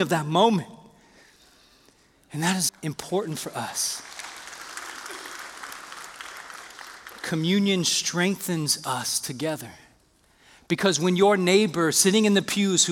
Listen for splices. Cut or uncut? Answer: cut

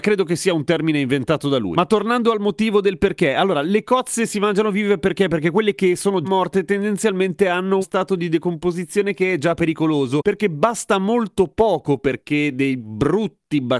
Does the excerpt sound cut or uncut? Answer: cut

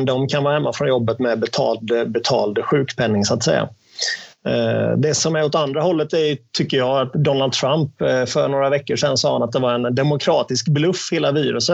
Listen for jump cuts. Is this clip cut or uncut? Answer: uncut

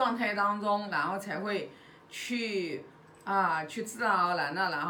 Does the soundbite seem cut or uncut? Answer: uncut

